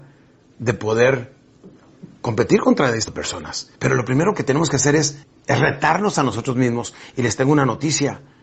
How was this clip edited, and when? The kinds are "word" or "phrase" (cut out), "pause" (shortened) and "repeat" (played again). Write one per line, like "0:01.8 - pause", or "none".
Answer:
0:03.1 - word
0:03.8 - pause
0:05.2 - pause